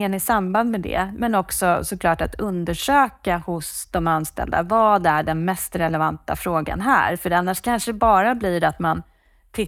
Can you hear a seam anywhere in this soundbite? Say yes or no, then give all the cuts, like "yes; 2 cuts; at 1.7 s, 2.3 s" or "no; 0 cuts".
no; 0 cuts